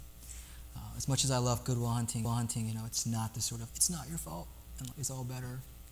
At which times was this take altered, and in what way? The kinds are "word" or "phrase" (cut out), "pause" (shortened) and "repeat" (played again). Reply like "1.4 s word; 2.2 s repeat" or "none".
2.2 s repeat; 3.7 s word; 4.9 s word